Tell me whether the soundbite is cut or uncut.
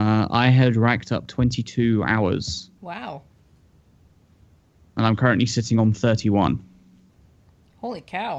cut